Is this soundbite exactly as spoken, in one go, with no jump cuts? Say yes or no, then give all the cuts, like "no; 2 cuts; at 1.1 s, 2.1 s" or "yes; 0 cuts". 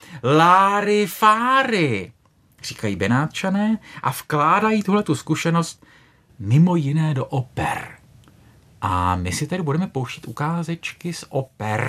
yes; 0 cuts